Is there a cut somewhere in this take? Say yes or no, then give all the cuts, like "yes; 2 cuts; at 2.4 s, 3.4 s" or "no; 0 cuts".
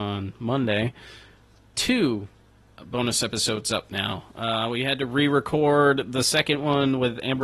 no; 0 cuts